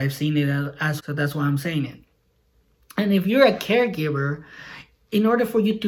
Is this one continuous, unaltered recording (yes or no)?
no